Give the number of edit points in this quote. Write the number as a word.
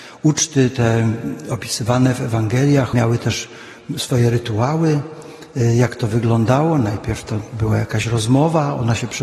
one